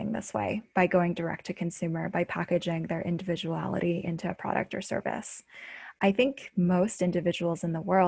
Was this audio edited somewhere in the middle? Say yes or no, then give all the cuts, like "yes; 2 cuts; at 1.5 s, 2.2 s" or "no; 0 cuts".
no; 0 cuts